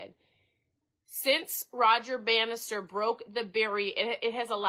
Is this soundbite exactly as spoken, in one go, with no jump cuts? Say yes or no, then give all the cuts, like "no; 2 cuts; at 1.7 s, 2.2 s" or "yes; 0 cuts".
yes; 0 cuts